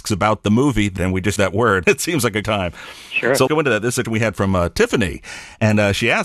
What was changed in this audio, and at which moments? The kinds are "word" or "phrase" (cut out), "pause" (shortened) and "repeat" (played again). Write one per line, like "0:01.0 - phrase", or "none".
0:01.0 - word
0:01.4 - word
0:01.8 - word
0:02.4 - word
0:03.5 - word
0:04.0 - word